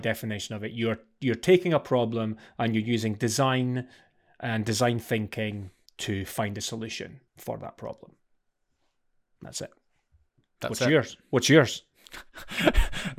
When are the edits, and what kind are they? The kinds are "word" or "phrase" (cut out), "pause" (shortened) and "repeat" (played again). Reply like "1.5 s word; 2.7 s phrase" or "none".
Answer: 5.9 s pause; 7.3 s pause